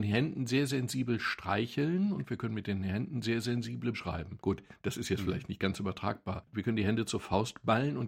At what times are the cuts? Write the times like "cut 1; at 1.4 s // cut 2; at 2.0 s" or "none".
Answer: cut 1; at 3.9 s